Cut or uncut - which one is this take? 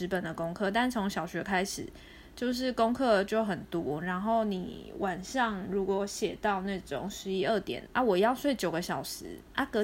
cut